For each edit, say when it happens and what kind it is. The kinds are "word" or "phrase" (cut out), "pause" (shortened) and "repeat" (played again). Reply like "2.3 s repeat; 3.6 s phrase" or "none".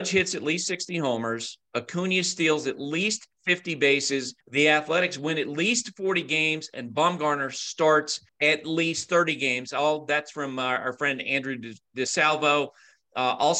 4.4 s pause; 8.3 s pause